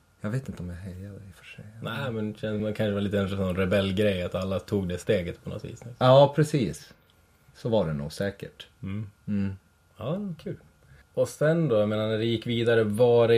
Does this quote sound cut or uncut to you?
uncut